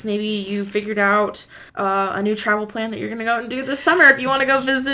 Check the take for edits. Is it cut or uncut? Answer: cut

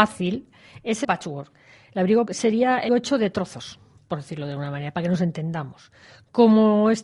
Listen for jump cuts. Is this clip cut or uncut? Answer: cut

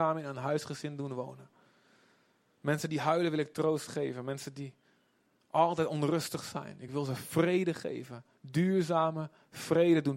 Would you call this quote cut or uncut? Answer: uncut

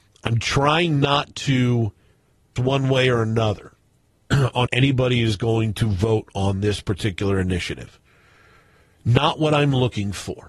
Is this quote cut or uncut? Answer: cut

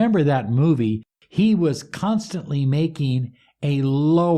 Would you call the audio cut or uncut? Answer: uncut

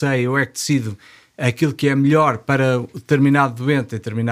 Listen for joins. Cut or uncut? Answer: uncut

